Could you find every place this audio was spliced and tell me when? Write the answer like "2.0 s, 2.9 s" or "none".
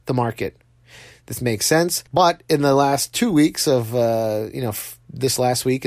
2.1 s